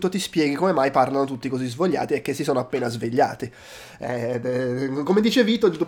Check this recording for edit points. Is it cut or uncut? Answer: uncut